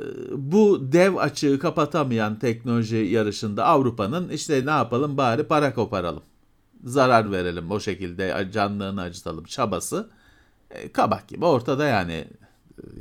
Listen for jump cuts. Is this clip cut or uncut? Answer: uncut